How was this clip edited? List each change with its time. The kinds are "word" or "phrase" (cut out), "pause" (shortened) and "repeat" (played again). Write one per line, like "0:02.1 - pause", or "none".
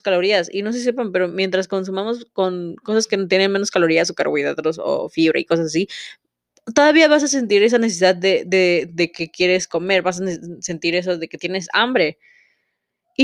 none

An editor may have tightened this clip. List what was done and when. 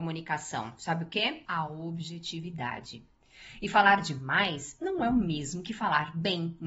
0:01.4 - pause

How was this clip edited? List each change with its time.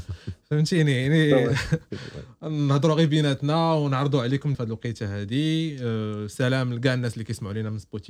0:04.5 - phrase

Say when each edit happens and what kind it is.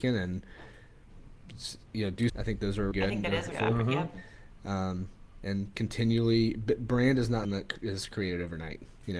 0:02.3 - word
0:02.9 - word
0:03.5 - word
0:05.7 - word
0:07.4 - word

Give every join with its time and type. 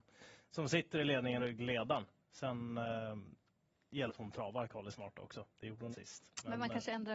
0:01.4 - word
0:04.1 - word
0:05.5 - pause
0:05.9 - word

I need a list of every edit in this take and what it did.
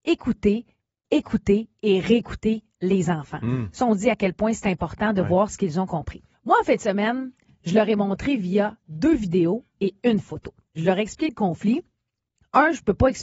0:06.3 - pause

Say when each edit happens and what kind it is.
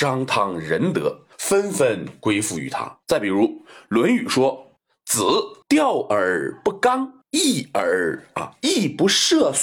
0:01.3 - pause
0:03.0 - pause
0:04.8 - pause
0:05.6 - pause
0:07.2 - pause

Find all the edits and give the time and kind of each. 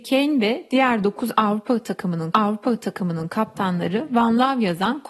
0:02.3 - repeat

